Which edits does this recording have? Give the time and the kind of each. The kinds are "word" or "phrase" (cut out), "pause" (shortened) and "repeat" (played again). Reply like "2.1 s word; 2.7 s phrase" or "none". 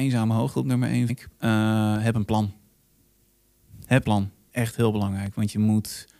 1.1 s word; 4.0 s word; 4.5 s word